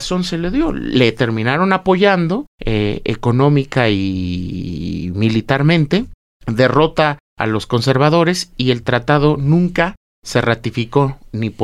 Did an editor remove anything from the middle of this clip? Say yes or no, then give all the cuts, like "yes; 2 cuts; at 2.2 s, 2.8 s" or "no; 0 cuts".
yes; 1 cut; at 2.5 s